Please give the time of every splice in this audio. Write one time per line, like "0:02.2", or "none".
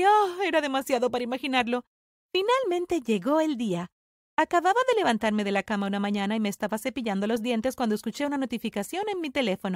none